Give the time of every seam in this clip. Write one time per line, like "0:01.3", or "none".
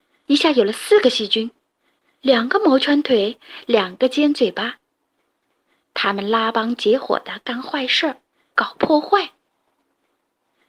none